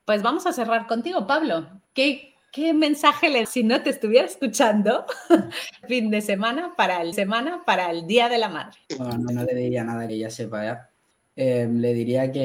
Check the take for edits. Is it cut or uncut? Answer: cut